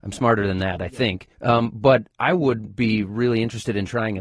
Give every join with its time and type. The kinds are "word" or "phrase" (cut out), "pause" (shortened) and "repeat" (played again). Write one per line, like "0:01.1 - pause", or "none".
0:01.3 - pause
0:02.1 - pause